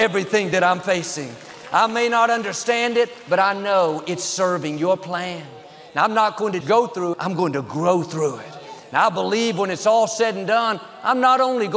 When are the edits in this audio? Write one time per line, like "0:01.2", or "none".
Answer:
0:06.6
0:07.1

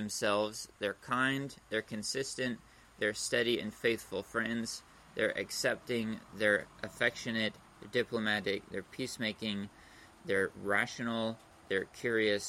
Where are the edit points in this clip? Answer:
none

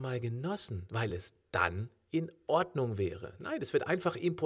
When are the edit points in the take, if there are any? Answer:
none

